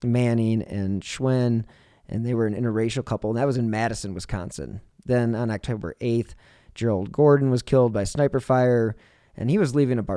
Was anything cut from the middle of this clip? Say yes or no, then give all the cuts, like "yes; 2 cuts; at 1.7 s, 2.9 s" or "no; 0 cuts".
no; 0 cuts